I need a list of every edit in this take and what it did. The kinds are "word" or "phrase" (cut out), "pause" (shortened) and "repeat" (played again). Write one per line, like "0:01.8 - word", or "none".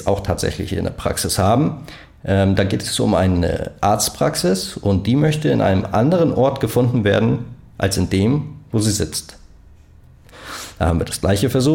none

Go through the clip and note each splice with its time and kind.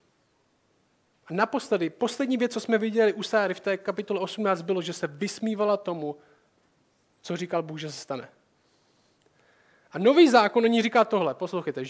none

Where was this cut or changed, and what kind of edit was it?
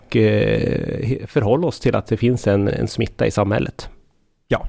0:02.7 - word

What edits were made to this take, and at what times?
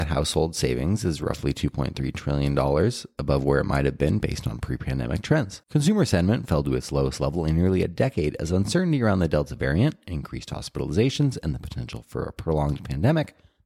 0:05.6 - pause

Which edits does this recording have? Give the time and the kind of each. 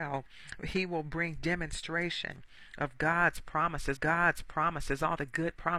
0:04.0 - repeat

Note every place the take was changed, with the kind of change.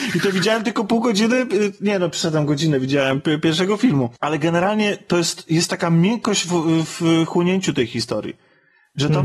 none

